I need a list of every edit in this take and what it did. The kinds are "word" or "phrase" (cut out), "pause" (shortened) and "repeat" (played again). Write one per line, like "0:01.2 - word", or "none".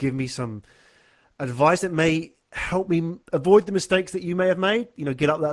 0:03.2 - pause

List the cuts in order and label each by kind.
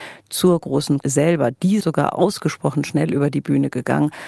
0:01.0 - word
0:01.8 - word

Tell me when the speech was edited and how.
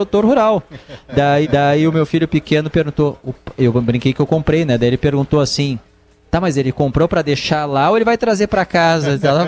0:01.4 - repeat

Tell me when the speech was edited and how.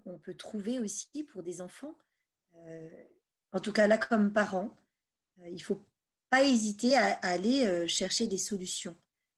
none

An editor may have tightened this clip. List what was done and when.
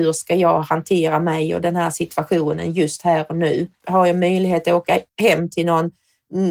0:03.7 - pause
0:05.1 - pause

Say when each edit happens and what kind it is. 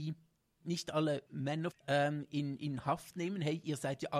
0:01.3 - word
0:01.7 - phrase

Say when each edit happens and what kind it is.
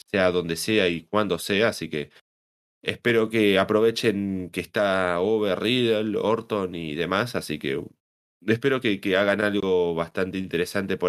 none

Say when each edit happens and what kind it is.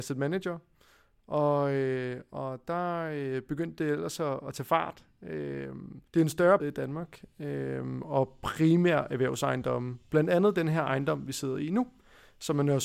0:06.1 - pause
0:06.6 - phrase

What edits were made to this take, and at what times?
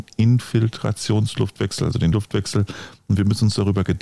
0:02.1 - word

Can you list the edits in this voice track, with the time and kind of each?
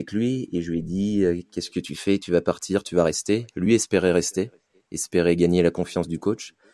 none

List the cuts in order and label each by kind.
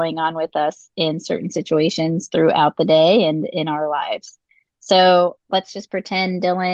0:05.4 - pause

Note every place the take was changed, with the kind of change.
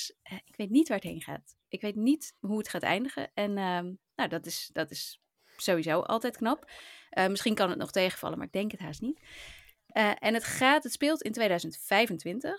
0:02.4 - pause

